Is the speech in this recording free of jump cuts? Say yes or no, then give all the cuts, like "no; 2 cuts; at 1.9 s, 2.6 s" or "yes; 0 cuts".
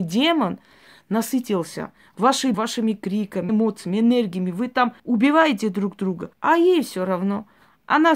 no; 4 cuts; at 2.5 s, 3.5 s, 5.0 s, 6.3 s